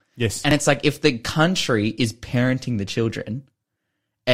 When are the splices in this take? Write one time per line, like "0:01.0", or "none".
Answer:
none